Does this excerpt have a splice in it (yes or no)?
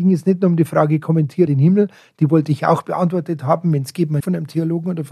yes